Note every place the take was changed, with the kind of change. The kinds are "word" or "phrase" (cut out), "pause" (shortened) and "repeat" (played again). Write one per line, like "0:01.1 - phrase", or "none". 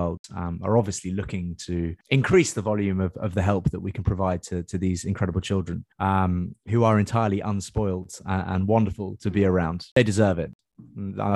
0:02.0 - pause
0:05.9 - pause